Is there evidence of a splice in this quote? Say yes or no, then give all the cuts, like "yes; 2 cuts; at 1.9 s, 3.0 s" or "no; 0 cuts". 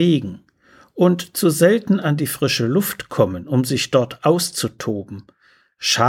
no; 0 cuts